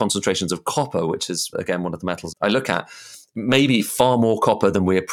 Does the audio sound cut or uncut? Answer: cut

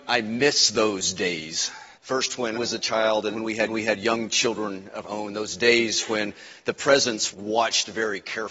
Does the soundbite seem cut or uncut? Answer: cut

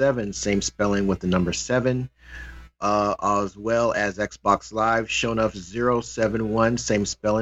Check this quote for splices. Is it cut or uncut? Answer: uncut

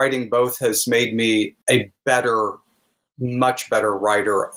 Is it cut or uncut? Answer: cut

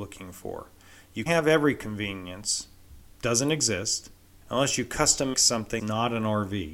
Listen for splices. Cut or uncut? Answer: cut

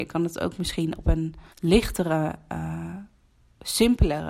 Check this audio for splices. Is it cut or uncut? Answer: cut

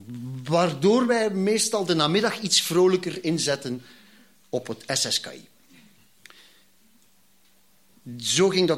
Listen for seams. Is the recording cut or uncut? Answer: uncut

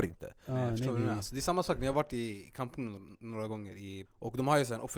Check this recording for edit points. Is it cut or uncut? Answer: cut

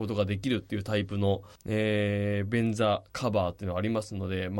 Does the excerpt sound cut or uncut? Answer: cut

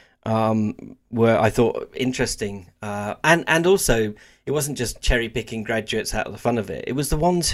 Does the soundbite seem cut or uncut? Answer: uncut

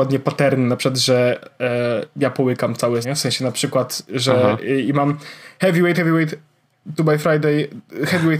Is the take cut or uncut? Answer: cut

